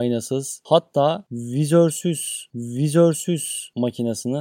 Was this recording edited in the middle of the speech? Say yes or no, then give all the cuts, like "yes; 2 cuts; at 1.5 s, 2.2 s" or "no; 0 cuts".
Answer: yes; 1 cut; at 2.5 s